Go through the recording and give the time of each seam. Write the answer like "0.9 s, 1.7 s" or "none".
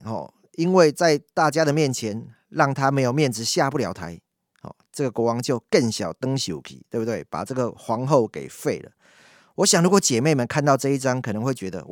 none